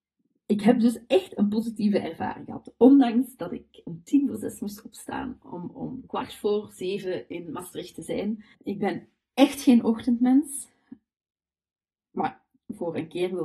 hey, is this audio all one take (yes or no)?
no